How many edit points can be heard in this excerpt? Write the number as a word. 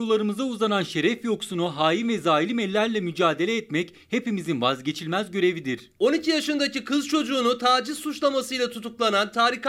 zero